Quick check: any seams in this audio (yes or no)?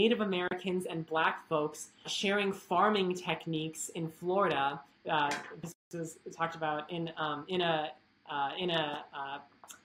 yes